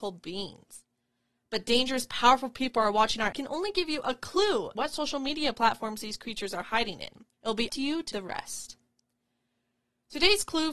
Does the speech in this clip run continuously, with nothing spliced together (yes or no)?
no